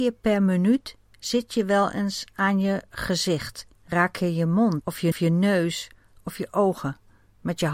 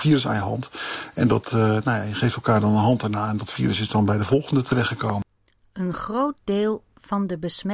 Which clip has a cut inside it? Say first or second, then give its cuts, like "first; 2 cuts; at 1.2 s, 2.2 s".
first; 3 cuts; at 3.7 s, 4.8 s, 5.1 s